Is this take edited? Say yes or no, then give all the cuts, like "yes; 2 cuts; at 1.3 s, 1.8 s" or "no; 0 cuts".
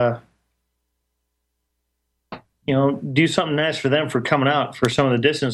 no; 0 cuts